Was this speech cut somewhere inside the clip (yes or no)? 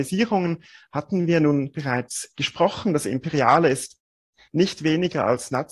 no